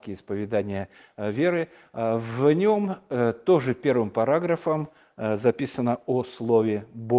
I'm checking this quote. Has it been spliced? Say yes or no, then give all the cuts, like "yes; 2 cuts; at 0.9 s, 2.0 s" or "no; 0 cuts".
no; 0 cuts